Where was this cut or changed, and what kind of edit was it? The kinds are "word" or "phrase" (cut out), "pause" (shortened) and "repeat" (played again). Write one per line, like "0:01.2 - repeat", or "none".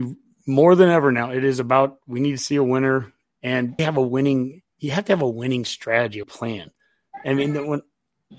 0:03.2 - word
0:03.8 - word
0:06.2 - word